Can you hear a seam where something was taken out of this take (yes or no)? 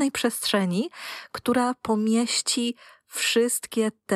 no